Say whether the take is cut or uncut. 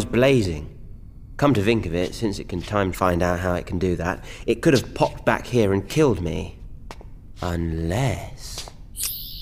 cut